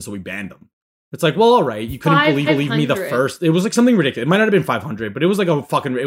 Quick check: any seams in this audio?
yes; 1 cut; at 2.5 s

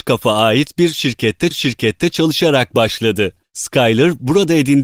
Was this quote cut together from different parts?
yes; 1 cut; at 1.5 s

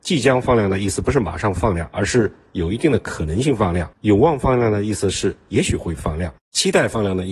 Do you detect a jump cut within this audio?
yes; 2 cuts; at 3.9 s, 6.4 s

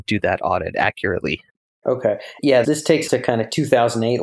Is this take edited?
yes; 3 cuts; at 1.8 s, 2.6 s, 3.1 s

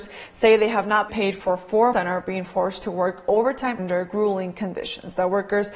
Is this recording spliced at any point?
yes; 3 cuts; at 1.1 s, 1.9 s, 3.8 s

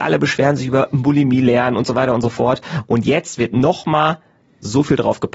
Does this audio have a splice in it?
no; 0 cuts

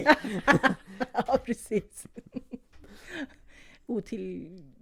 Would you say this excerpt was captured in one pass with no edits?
yes; 0 cuts

